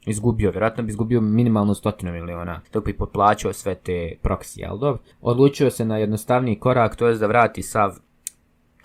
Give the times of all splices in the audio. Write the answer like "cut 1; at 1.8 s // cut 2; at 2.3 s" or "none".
cut 1; at 2.6 s // cut 2; at 5.1 s